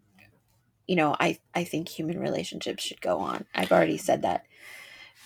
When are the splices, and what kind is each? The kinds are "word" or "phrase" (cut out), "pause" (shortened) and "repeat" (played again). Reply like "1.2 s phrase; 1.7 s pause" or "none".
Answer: 1.5 s pause

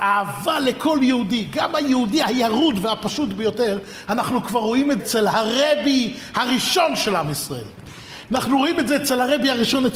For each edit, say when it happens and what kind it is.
5.0 s word

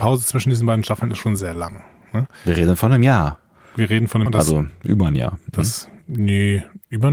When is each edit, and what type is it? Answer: 1.4 s word; 4.3 s word

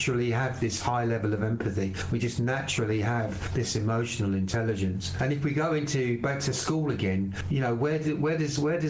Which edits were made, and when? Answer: none

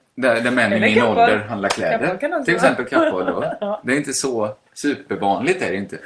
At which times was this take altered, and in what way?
none

